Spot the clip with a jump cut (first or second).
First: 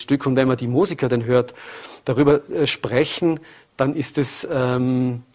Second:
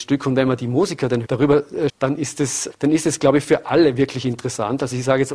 second